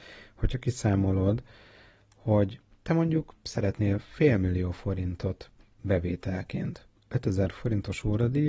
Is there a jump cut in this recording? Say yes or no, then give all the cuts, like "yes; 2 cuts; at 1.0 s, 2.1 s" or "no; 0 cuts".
no; 0 cuts